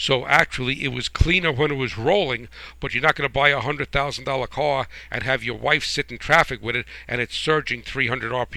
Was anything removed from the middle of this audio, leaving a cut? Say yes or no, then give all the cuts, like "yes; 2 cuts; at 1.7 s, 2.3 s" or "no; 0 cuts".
no; 0 cuts